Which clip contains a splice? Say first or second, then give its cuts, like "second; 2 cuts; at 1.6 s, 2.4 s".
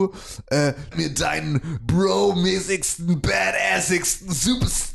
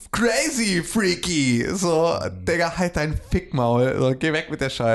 first; 2 cuts; at 0.9 s, 1.8 s